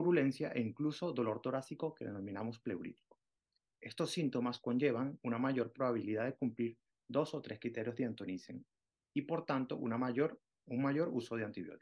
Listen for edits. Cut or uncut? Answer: uncut